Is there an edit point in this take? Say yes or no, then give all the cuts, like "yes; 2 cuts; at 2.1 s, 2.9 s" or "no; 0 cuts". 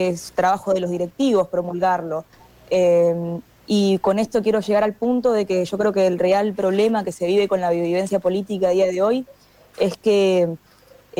no; 0 cuts